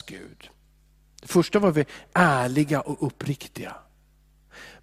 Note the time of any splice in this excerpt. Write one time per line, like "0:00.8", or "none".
none